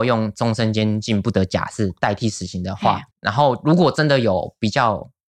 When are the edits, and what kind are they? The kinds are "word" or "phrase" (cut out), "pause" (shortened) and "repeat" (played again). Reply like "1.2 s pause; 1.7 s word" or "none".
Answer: 3.1 s pause

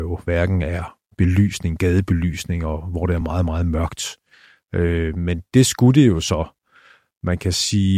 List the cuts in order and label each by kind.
none

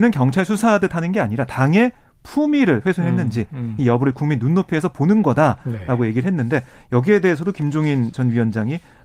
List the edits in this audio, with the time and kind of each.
none

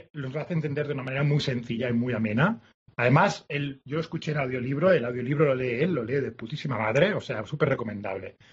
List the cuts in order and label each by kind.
none

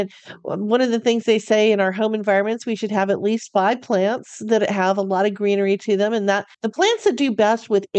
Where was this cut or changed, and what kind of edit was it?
6.5 s pause

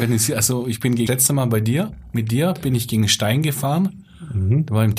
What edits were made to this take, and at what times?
1.1 s phrase

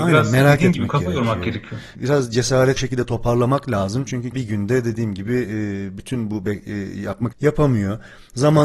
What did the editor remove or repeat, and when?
2.8 s word; 4.3 s word; 7.3 s word

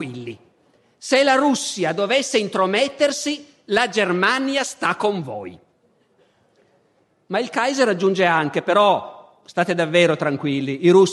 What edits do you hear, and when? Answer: none

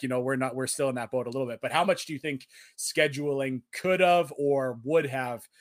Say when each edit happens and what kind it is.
none

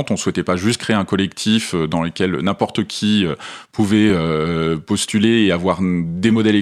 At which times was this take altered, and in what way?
none

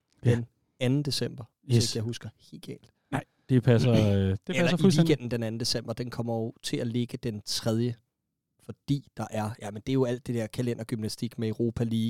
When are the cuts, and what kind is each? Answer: none

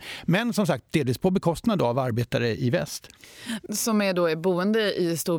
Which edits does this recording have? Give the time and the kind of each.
3.7 s word

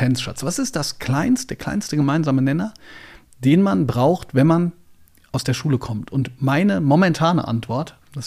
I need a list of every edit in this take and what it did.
none

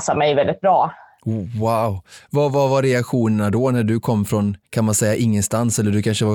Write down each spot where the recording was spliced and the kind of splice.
4.6 s pause

